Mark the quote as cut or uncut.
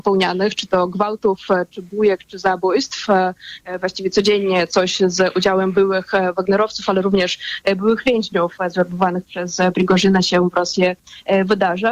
uncut